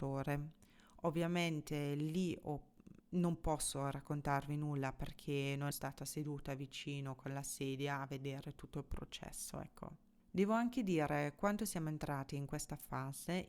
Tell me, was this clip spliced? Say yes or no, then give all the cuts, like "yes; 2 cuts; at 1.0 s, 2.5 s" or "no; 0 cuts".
yes; 2 cuts; at 3.0 s, 5.7 s